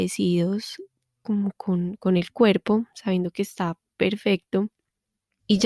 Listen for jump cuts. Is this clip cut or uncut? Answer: uncut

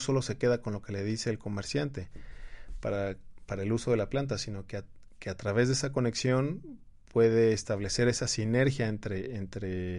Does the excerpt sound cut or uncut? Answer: uncut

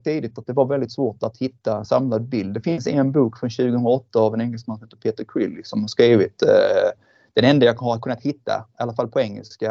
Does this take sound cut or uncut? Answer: uncut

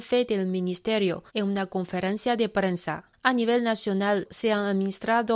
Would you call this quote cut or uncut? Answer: cut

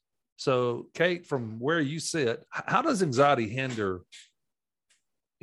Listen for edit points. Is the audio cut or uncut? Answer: cut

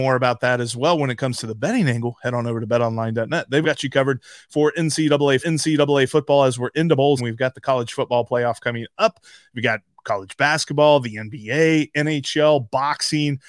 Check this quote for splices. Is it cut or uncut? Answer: cut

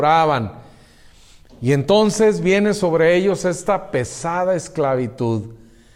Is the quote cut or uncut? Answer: uncut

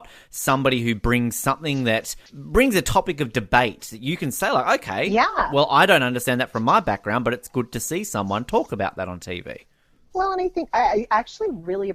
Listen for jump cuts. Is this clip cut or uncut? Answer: cut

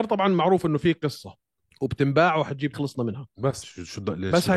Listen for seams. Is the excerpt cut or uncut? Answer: cut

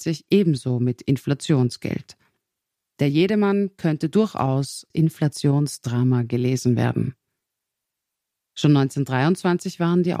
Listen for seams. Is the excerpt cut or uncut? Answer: cut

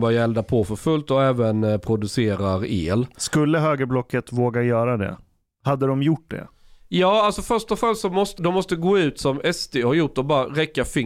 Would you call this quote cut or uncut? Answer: cut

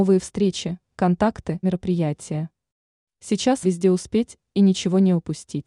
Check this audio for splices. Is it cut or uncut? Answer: cut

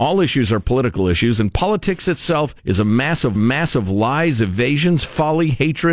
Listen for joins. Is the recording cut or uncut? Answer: cut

